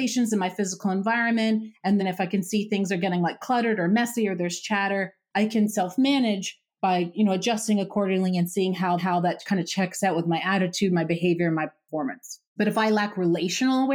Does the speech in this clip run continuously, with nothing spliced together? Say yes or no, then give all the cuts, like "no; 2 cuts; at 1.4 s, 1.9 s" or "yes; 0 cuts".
no; 3 cuts; at 2.0 s, 9.0 s, 12.5 s